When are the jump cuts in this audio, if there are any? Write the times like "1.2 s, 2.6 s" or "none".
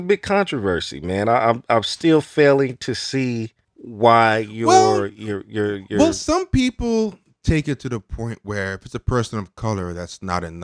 none